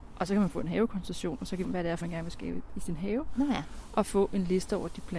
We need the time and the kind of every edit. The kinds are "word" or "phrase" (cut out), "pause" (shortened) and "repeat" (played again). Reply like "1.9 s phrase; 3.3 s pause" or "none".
1.6 s phrase; 2.0 s word

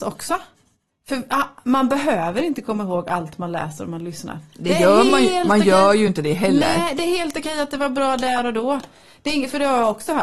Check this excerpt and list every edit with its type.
none

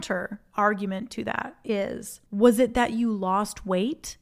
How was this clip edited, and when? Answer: 2.3 s pause

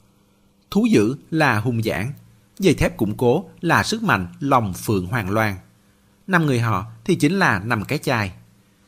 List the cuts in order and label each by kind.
none

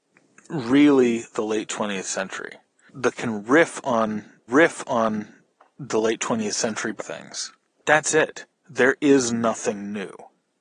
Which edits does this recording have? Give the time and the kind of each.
3.1 s word; 4.5 s repeat; 7.0 s word; 7.8 s word

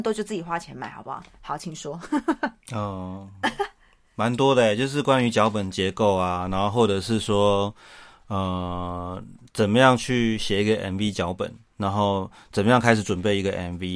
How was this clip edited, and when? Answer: 2.6 s pause

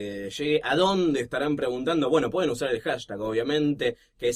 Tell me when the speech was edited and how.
none

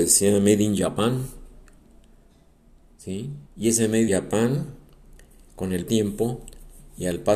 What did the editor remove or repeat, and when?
3.5 s pause; 4.1 s word; 5.9 s phrase

